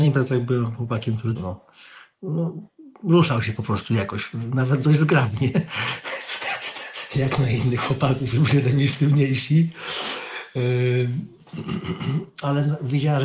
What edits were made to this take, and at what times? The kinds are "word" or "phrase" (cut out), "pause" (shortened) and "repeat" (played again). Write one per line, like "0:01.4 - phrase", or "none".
0:01.4 - word
0:08.3 - word